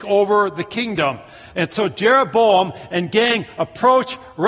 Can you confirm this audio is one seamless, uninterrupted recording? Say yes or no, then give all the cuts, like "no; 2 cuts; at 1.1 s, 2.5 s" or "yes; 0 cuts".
yes; 0 cuts